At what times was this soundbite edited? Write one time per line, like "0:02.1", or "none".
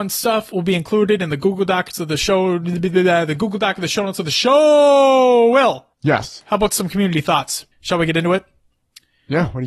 0:05.9
0:07.7